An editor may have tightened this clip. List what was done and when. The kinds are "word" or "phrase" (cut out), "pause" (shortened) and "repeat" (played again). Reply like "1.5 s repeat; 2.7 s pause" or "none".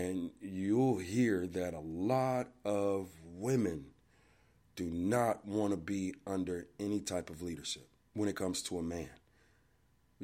none